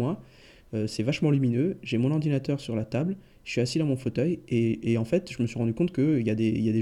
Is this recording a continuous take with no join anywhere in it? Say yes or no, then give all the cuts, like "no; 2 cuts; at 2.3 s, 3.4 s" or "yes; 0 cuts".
yes; 0 cuts